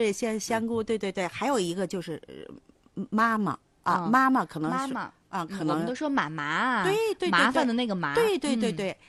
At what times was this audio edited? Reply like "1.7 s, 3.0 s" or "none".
none